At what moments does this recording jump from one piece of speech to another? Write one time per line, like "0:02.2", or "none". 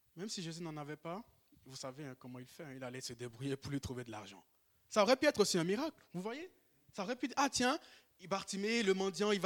none